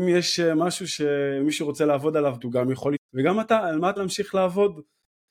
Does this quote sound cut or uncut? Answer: cut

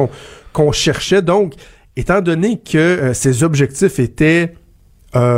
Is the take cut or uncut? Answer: uncut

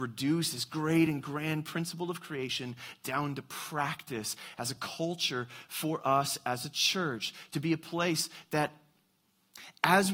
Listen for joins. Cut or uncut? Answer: uncut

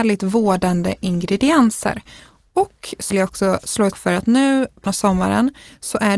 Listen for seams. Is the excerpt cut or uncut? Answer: cut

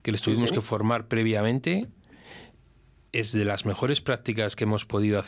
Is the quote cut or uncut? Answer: uncut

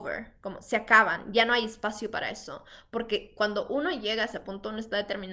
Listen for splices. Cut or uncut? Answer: uncut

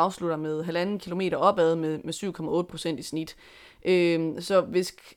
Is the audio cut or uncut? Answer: uncut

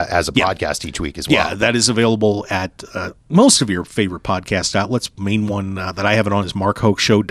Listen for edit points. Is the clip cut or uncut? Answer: uncut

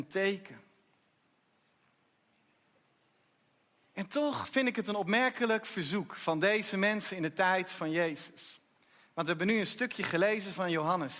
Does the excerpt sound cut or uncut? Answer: uncut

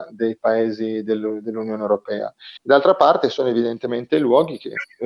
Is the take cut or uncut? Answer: cut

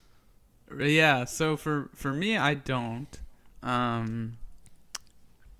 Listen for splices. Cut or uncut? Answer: cut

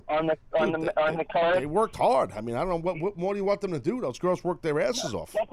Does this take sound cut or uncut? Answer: uncut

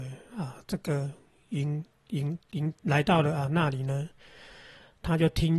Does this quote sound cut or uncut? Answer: uncut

